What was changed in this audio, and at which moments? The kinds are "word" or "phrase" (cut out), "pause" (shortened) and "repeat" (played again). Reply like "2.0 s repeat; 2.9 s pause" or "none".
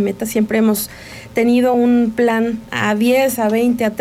none